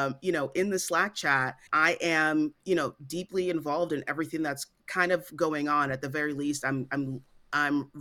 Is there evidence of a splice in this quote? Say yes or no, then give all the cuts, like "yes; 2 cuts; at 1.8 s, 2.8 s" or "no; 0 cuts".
no; 0 cuts